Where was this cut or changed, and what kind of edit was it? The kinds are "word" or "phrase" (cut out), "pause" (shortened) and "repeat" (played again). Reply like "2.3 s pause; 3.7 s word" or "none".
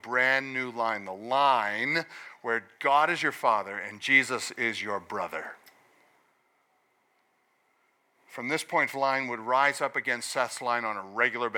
8.9 s phrase